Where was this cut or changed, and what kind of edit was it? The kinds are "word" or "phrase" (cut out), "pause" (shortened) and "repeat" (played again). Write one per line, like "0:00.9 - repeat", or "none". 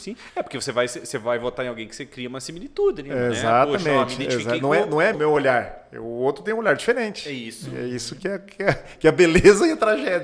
0:05.1 - word